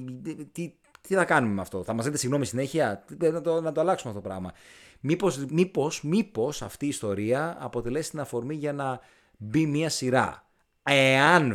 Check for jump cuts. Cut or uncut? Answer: uncut